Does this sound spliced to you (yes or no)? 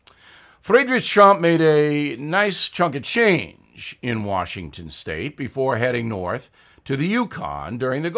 no